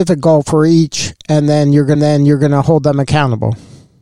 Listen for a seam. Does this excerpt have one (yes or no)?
yes